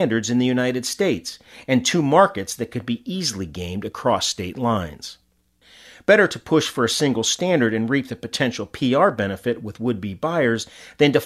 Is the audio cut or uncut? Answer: uncut